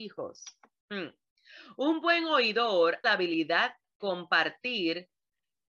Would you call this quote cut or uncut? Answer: cut